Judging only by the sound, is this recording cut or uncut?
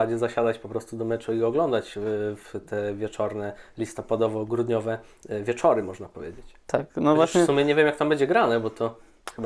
uncut